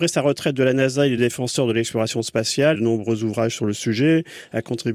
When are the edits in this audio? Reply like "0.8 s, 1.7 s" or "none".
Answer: 1.2 s, 2.7 s